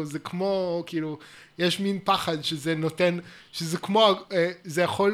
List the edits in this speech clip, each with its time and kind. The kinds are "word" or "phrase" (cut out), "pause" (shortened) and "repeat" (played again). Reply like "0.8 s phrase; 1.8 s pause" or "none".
none

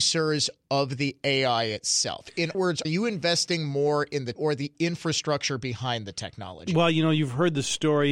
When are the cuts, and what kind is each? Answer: 2.5 s word; 2.8 s word; 4.3 s word

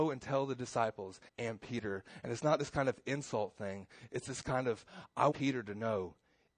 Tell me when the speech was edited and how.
1.3 s pause; 5.3 s word

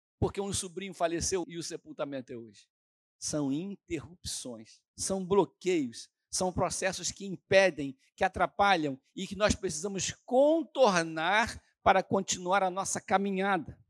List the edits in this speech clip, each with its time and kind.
1.4 s word; 4.9 s pause

